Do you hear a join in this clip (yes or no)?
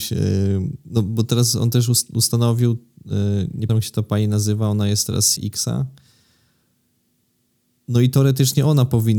yes